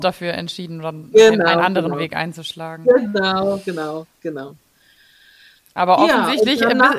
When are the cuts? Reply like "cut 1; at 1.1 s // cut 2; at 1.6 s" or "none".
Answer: none